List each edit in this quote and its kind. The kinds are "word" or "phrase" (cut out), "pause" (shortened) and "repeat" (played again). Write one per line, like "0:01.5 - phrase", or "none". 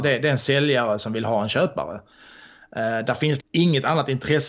0:03.4 - word